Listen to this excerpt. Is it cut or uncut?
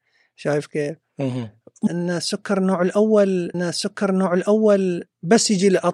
cut